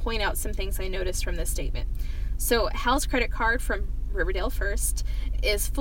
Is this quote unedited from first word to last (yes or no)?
yes